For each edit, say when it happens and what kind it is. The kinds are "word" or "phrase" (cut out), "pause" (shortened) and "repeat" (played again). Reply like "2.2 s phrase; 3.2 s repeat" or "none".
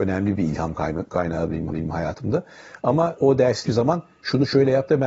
1.7 s repeat; 3.2 s word; 3.7 s word